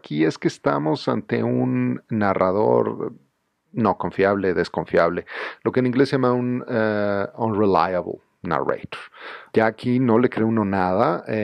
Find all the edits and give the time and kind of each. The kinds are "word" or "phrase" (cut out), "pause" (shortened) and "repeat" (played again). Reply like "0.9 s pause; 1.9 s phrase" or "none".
9.5 s pause